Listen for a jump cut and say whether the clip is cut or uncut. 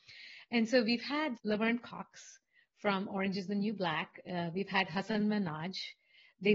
cut